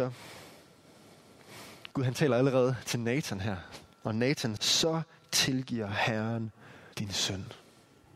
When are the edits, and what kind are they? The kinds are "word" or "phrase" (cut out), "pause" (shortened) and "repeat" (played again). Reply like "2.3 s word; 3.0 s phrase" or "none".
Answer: 1.9 s pause; 4.6 s phrase; 6.9 s pause